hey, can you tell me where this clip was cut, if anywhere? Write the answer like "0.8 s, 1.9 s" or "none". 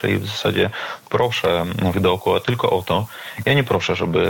1.9 s